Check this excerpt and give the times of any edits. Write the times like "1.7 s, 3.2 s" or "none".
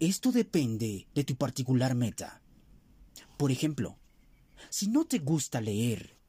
1.1 s